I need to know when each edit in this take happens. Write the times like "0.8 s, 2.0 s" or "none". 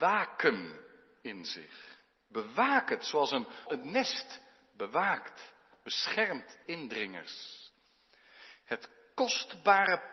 3.7 s, 6.6 s